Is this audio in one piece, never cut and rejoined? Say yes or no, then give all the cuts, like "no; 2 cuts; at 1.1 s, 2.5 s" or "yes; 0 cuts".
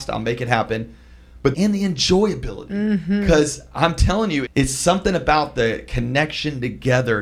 no; 2 cuts; at 1.5 s, 4.5 s